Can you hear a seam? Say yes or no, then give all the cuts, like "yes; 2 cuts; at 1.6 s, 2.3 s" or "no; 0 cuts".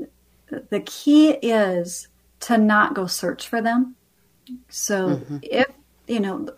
yes; 1 cut; at 2.3 s